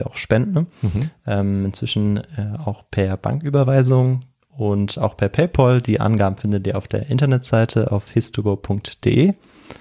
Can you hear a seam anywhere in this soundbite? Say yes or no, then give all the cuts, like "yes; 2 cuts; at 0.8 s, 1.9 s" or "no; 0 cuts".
no; 0 cuts